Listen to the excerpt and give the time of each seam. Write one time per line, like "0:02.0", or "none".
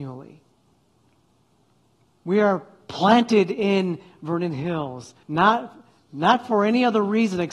0:05.2